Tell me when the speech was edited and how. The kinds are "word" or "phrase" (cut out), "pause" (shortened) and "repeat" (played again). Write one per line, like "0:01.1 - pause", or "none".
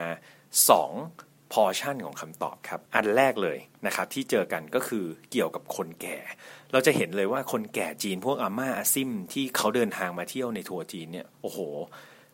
0:02.9 - pause
0:11.3 - pause